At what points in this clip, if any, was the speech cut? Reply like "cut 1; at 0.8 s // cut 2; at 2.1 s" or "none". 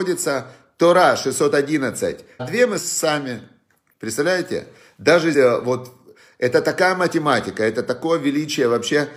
cut 1; at 2.4 s // cut 2; at 2.8 s // cut 3; at 5.3 s